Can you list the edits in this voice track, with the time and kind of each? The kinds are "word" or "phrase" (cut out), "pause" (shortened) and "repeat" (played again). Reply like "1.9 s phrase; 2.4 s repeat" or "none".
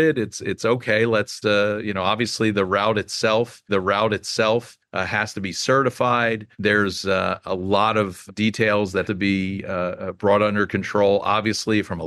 1.4 s word; 3.7 s repeat; 6.5 s pause; 8.3 s word; 9.0 s word